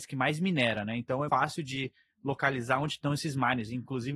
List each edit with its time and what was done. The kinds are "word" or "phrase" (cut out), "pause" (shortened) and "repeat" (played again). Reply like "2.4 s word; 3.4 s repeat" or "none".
1.3 s word